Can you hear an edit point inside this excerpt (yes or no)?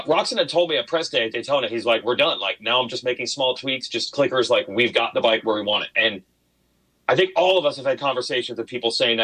no